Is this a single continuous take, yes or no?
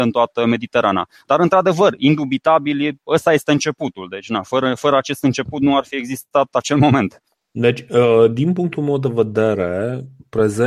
yes